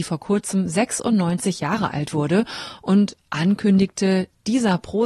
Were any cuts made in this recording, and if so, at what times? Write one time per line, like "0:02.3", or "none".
none